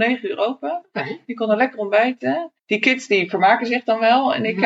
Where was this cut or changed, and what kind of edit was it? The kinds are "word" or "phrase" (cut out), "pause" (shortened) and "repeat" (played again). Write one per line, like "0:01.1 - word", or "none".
0:02.6 - pause

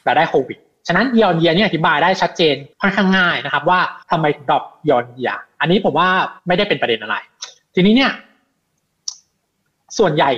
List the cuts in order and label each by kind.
0:02.7 - pause
0:04.0 - pause
0:06.4 - pause

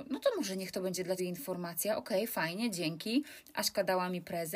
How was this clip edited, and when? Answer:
0:01.2 - word

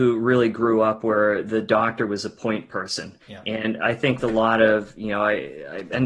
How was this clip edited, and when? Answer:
0:03.2 - pause
0:04.2 - word

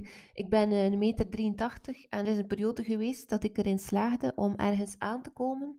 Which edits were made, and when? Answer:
0:02.2 - word

